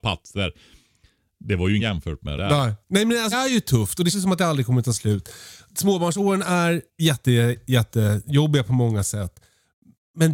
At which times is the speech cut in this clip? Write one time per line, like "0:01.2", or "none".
0:01.8
0:02.4
0:03.3
0:04.1
0:06.9